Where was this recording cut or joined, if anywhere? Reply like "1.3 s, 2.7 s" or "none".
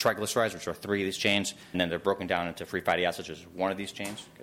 1.7 s